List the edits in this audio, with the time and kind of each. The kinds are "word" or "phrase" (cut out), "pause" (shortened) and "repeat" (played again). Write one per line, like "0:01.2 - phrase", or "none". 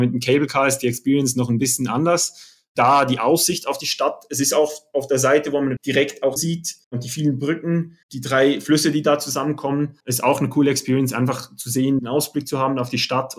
0:05.8 - word
0:06.4 - phrase
0:06.8 - pause
0:08.0 - pause
0:10.0 - pause
0:12.0 - word